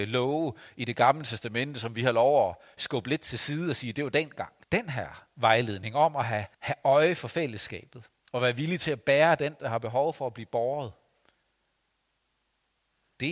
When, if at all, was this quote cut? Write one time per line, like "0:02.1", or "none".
0:04.6
0:06.5
0:08.2